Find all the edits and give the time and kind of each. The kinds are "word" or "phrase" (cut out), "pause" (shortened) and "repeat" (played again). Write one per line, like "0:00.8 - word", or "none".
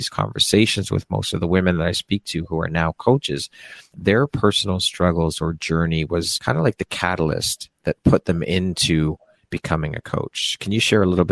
none